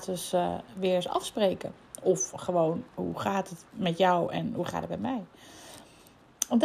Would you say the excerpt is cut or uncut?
uncut